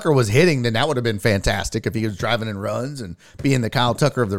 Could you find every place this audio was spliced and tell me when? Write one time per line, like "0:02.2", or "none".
none

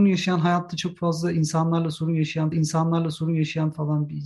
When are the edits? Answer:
0:02.5

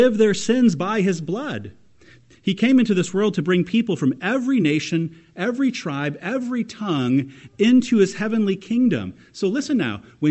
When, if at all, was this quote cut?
none

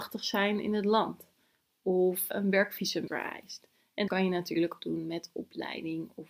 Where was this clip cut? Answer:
0:03.1
0:04.1
0:04.8

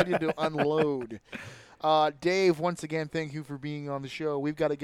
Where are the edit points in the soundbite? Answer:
none

